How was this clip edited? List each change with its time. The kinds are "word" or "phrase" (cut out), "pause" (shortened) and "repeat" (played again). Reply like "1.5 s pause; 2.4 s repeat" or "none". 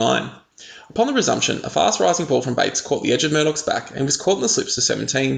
none